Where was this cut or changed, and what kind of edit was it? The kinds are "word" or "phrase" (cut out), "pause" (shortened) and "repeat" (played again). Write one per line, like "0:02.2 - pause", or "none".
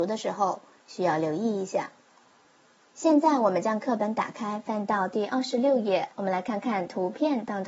0:06.1 - pause